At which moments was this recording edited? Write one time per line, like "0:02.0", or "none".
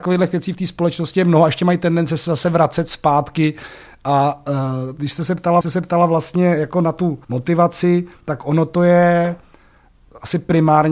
0:05.6
0:07.2